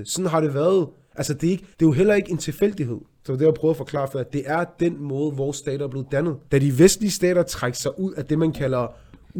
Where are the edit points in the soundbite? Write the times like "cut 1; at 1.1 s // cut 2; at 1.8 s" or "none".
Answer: cut 1; at 1.7 s // cut 2; at 6.5 s